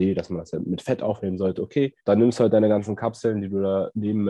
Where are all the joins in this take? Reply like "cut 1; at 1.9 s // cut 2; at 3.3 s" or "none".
cut 1; at 2.0 s